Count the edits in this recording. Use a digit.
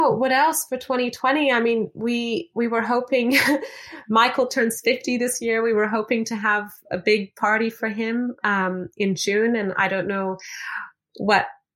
0